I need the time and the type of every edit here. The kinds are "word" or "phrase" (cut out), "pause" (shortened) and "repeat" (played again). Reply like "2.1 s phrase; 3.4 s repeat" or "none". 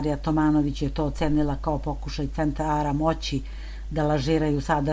none